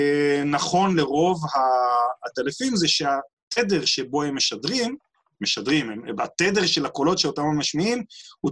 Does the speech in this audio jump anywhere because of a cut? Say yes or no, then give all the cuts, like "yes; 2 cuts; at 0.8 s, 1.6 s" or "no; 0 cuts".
no; 0 cuts